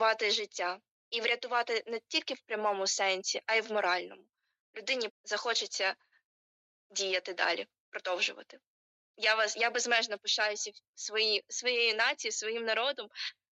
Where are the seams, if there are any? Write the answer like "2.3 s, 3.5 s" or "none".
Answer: 5.1 s

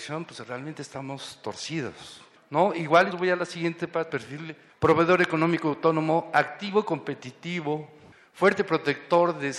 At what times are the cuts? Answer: 2.4 s, 3.1 s, 4.1 s

